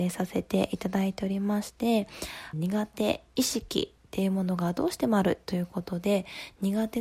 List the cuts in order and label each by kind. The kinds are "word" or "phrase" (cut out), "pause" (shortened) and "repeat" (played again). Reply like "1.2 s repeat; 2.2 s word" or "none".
2.5 s phrase; 4.0 s pause